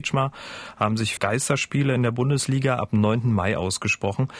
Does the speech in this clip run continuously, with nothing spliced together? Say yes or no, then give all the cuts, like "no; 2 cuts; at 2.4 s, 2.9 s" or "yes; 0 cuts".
no; 1 cut; at 1.2 s